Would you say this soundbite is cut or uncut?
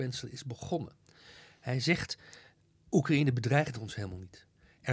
uncut